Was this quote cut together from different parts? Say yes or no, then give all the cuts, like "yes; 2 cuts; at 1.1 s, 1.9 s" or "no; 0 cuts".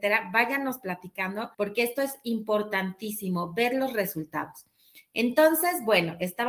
yes; 1 cut; at 1.5 s